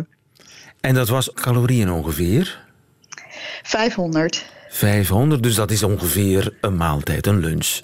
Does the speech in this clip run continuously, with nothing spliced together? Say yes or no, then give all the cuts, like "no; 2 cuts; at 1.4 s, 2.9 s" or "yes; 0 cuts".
no; 1 cut; at 1.3 s